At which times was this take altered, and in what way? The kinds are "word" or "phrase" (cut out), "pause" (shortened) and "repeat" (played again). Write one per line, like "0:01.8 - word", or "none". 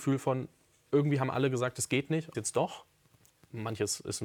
0:02.3 - phrase